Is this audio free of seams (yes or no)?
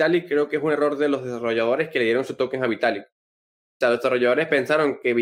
yes